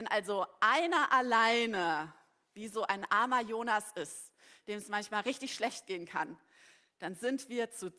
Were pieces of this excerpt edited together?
no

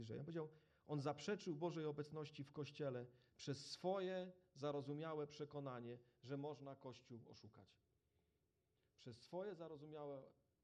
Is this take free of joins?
yes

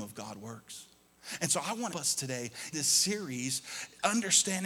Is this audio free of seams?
no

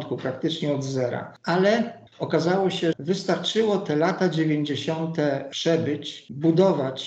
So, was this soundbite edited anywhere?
yes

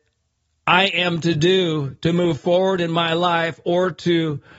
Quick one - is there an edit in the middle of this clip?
no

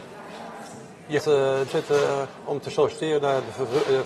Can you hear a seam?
yes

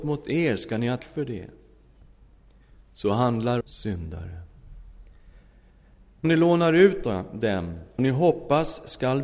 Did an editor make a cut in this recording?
yes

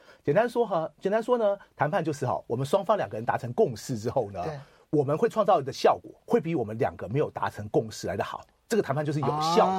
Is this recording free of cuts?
no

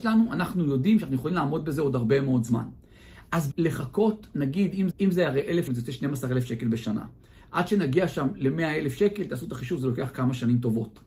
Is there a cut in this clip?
yes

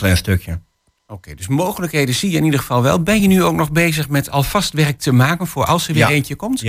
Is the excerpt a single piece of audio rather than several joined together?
yes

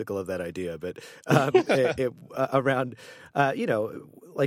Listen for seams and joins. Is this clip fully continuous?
yes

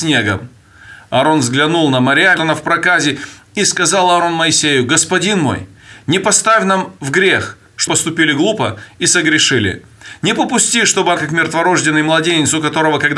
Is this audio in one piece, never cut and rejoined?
no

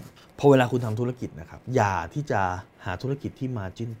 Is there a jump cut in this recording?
yes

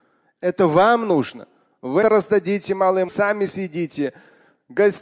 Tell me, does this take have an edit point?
yes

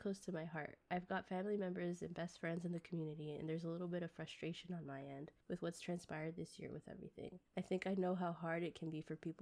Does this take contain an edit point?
yes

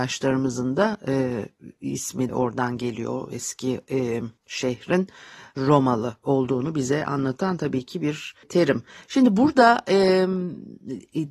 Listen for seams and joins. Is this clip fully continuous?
no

